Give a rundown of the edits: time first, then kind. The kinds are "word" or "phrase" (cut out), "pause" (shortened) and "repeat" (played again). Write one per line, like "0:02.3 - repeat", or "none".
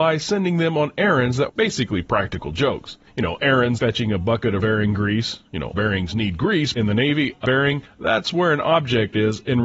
0:01.5 - word
0:03.8 - word
0:04.6 - word
0:05.7 - word
0:06.7 - word
0:07.4 - word